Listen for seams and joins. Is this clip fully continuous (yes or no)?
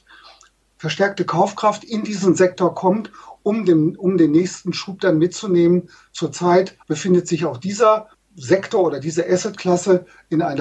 no